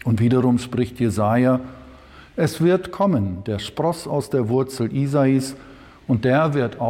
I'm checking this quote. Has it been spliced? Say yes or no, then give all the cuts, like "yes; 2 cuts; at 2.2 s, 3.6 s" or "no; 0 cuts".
no; 0 cuts